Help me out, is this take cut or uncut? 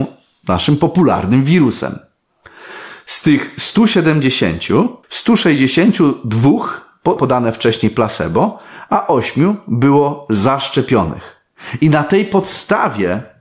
cut